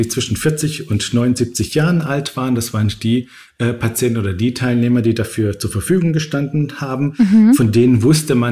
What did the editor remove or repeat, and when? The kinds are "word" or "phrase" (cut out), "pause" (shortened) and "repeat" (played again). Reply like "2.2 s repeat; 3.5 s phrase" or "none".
none